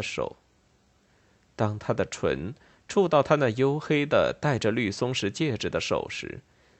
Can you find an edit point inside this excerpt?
no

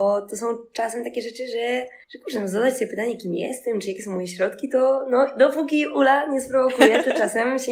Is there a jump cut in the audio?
yes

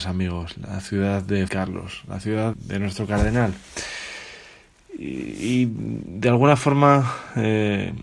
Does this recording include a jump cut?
yes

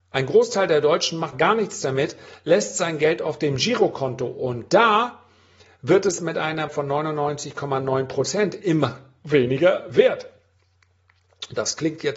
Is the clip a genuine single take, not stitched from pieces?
no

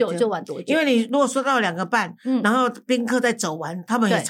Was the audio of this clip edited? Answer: no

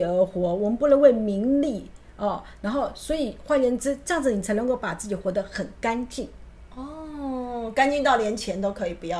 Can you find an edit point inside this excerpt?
yes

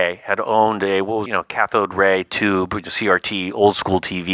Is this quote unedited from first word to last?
no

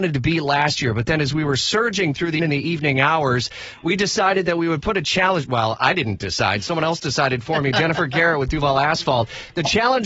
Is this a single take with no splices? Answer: no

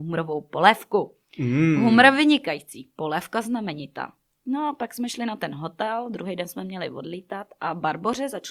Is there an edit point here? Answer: no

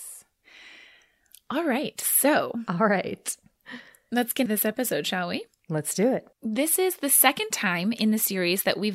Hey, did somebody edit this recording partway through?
yes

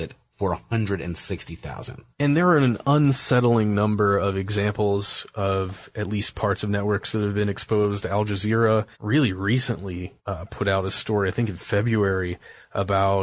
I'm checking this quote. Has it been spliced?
yes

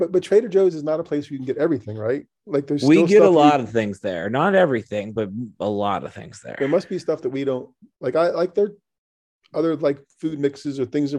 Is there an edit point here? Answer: yes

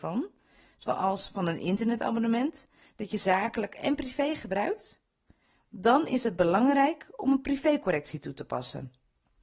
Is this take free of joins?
yes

